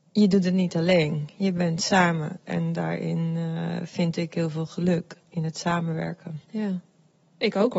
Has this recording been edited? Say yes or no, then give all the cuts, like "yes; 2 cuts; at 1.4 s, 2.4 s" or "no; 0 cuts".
yes; 1 cut; at 6.4 s